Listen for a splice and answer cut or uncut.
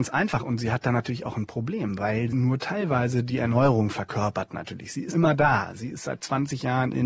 cut